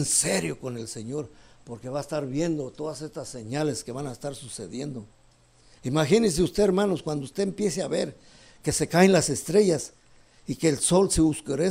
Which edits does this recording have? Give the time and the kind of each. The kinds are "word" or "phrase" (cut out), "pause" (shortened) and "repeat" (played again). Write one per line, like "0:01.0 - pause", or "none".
none